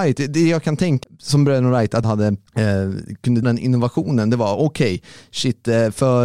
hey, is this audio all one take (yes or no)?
no